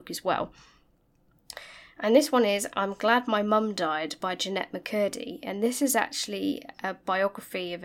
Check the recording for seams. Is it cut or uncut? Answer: uncut